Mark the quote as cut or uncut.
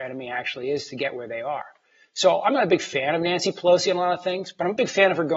uncut